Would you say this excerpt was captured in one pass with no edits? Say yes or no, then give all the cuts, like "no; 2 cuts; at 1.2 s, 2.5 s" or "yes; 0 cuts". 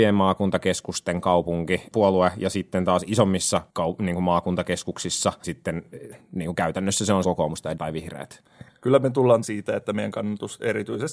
no; 6 cuts; at 1.9 s, 3.7 s, 5.4 s, 7.2 s, 7.8 s, 9.4 s